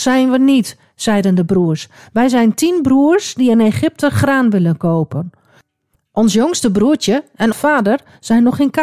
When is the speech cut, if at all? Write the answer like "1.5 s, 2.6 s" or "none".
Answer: 7.5 s